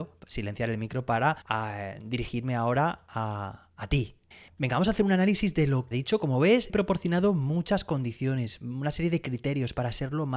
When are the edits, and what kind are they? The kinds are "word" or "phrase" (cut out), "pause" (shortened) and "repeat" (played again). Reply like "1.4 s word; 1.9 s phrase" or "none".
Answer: 1.4 s pause; 4.3 s pause; 5.9 s phrase; 6.7 s phrase